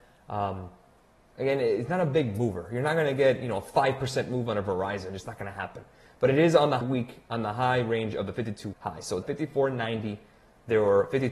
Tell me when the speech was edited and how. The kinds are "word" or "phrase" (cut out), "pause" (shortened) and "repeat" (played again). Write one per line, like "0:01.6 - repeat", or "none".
0:06.8 - word
0:08.7 - word
0:09.2 - word